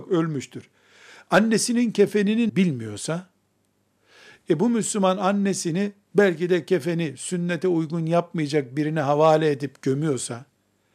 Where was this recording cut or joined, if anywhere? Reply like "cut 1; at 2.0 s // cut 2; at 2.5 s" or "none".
cut 1; at 2.5 s